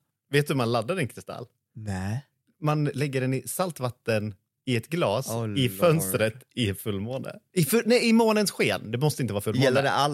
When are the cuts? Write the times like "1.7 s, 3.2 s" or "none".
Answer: none

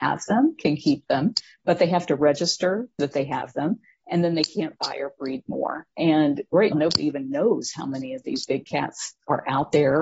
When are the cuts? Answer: 6.7 s

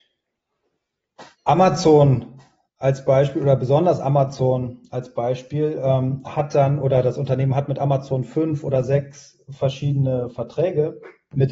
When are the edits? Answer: 1.3 s

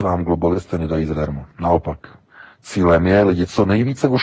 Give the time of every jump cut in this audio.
1.5 s

